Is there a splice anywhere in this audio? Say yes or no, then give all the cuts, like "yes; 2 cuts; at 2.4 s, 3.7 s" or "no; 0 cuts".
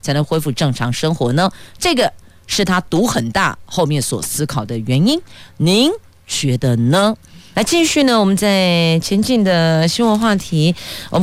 no; 0 cuts